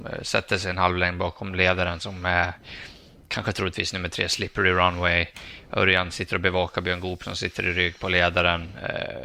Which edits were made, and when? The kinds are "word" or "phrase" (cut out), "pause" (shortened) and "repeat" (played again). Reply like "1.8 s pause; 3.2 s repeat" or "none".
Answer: none